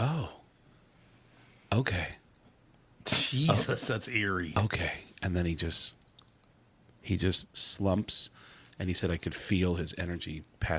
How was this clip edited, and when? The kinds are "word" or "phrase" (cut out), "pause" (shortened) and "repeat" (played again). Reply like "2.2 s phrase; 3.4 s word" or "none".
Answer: none